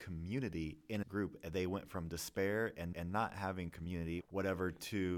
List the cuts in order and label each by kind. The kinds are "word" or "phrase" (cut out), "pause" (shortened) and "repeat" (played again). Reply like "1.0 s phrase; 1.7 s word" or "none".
1.0 s phrase; 2.9 s repeat; 4.2 s word

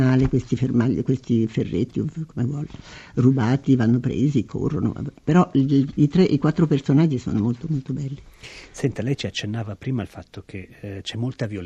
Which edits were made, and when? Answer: 5.2 s pause

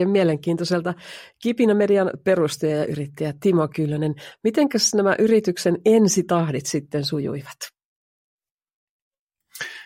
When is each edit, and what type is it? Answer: none

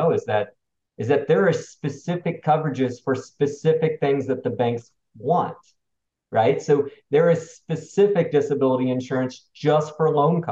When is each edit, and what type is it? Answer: none

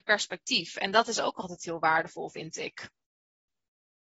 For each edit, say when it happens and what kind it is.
none

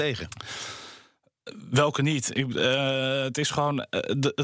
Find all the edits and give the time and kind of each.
none

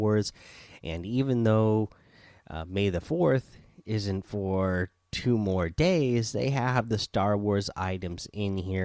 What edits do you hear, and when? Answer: none

